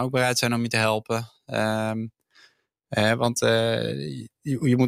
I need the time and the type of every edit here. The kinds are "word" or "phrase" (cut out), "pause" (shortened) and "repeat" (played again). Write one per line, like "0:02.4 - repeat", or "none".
none